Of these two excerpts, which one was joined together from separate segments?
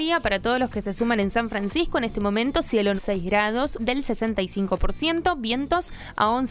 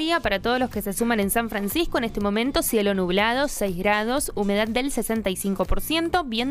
first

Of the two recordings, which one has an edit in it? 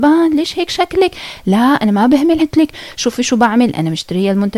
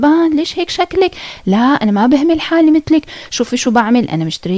first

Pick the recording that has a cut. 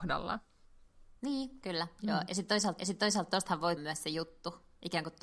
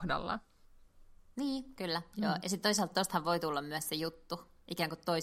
first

